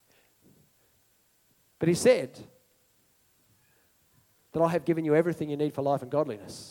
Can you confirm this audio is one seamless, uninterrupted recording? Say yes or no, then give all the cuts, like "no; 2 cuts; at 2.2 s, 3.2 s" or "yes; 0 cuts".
yes; 0 cuts